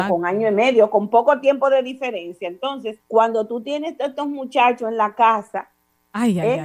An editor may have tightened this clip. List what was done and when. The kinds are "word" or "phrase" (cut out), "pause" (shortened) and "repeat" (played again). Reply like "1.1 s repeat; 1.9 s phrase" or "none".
3.0 s pause